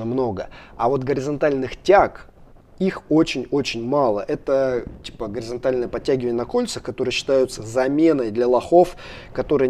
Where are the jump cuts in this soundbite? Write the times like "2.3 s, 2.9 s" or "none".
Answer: none